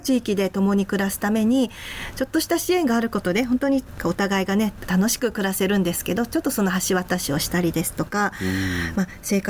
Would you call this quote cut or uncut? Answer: uncut